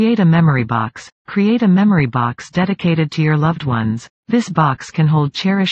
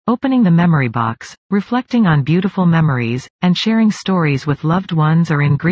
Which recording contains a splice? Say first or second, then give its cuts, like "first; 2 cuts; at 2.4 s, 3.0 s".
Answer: first; 2 cuts; at 1.2 s, 4.2 s